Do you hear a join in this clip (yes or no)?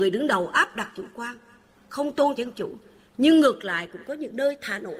yes